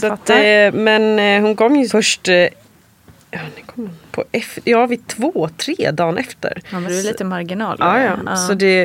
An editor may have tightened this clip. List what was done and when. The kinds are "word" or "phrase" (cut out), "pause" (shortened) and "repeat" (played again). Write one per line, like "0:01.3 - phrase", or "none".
0:01.9 - word
0:04.1 - word
0:06.9 - word